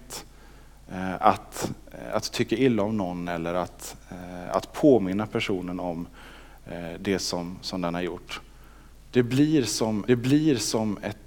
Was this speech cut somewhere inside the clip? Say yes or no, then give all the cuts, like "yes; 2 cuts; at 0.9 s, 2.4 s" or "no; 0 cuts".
yes; 2 cuts; at 8.9 s, 10.1 s